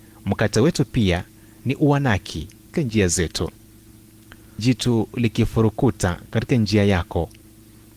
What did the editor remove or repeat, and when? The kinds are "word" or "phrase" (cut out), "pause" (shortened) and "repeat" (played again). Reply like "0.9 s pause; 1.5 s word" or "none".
2.7 s phrase; 4.6 s word